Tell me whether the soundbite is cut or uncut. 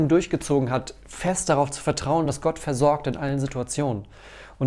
uncut